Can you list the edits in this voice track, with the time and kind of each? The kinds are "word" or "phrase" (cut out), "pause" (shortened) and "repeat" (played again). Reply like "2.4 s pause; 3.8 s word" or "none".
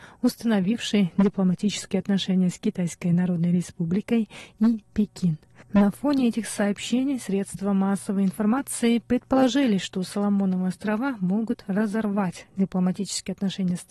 none